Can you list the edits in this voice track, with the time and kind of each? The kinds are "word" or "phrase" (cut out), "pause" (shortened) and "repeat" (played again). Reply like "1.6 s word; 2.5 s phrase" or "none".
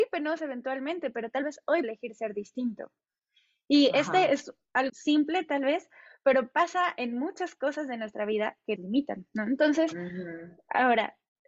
1.8 s word; 4.9 s word; 8.8 s word